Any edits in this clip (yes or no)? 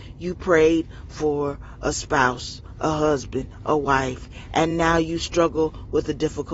no